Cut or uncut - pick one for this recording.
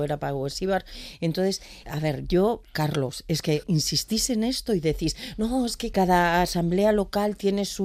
cut